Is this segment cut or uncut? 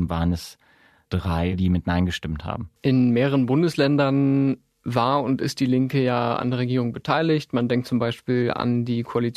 cut